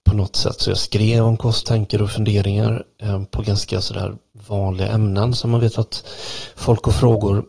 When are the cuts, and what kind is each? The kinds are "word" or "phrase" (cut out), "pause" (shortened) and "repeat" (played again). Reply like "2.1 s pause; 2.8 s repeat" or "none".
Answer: 1.6 s phrase; 4.3 s pause